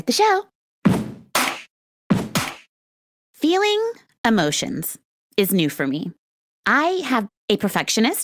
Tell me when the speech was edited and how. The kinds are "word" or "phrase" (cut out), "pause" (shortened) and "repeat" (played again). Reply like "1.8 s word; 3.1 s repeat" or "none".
7.3 s word